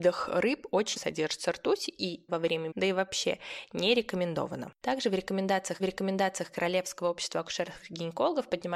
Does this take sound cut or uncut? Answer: cut